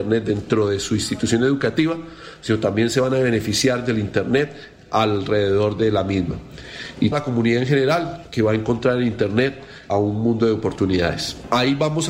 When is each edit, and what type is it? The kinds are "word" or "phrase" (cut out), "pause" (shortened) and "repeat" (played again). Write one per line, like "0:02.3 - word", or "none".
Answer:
0:07.1 - word
0:09.9 - phrase